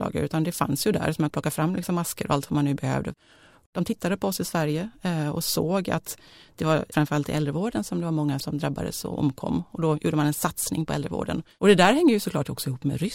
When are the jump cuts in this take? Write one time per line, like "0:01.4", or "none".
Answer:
0:01.3
0:06.9
0:08.4